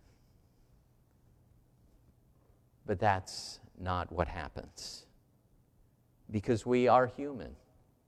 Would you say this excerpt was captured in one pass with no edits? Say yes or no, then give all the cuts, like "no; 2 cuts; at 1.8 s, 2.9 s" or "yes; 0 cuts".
yes; 0 cuts